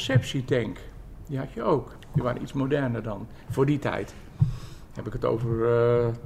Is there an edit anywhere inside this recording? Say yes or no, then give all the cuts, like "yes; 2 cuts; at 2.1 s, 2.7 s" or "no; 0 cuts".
no; 0 cuts